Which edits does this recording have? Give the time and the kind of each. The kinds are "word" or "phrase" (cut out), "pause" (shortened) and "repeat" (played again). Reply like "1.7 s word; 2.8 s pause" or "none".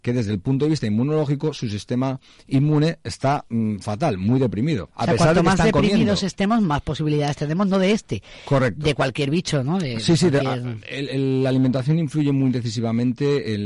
none

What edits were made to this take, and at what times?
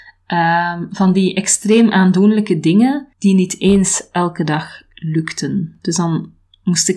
3.1 s pause

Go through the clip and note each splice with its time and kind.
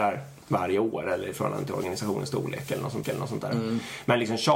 3.0 s repeat

